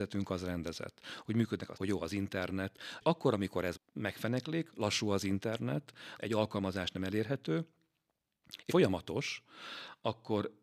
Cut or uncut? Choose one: cut